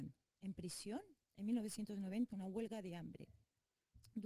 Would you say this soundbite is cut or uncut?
cut